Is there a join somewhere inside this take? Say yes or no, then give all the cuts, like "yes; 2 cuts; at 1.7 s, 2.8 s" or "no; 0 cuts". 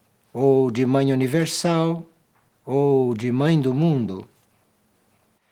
no; 0 cuts